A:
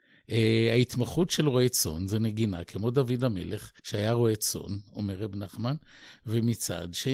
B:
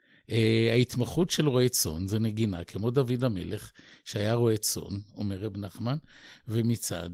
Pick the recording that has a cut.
A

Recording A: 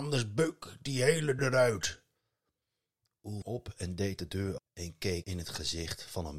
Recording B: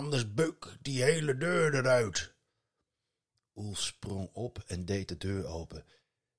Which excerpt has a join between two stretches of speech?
A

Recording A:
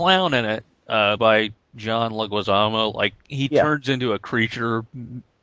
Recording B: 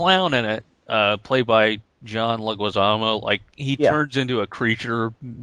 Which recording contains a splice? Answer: A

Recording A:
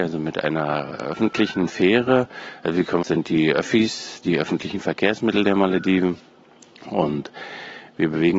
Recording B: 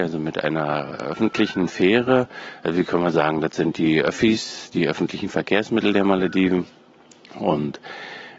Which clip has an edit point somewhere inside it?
A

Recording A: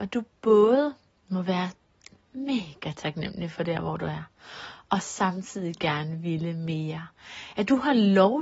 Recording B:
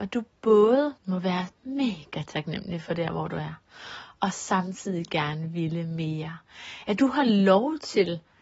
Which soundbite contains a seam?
B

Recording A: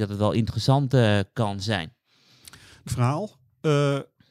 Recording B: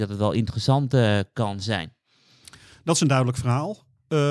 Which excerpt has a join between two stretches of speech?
A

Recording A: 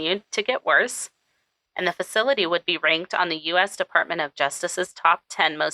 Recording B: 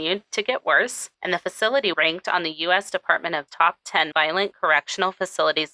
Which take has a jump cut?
B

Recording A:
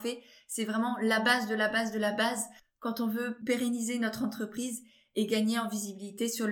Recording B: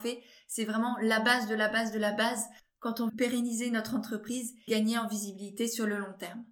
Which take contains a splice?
B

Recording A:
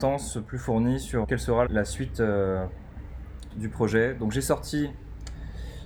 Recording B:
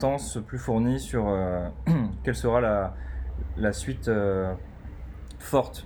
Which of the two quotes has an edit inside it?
A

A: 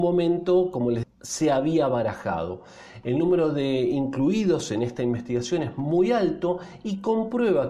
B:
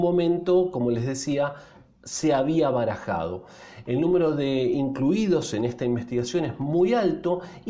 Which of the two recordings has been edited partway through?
A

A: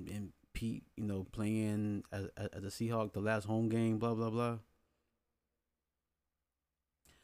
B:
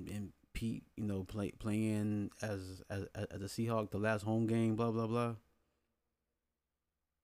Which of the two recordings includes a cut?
A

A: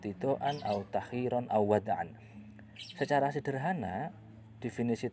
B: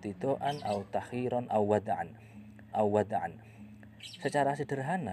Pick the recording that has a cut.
B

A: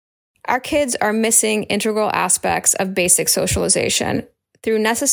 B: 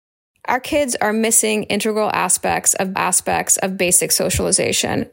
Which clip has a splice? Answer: B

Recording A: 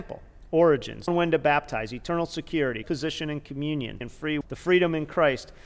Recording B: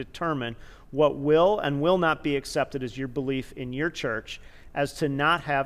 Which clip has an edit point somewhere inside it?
A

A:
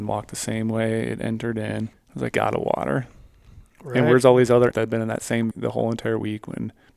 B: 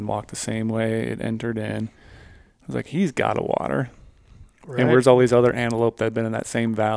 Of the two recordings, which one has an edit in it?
A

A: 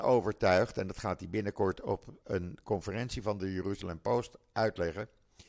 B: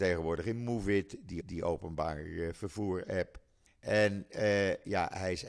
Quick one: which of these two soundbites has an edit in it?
B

